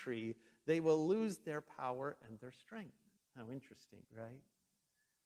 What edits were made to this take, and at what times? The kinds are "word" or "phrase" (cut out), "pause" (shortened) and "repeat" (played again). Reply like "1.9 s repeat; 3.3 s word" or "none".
3.2 s pause; 4.0 s pause